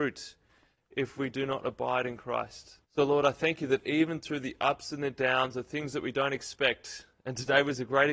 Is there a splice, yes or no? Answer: yes